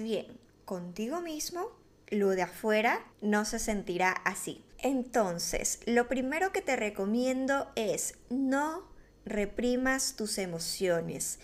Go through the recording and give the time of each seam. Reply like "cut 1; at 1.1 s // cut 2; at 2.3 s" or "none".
cut 1; at 3.1 s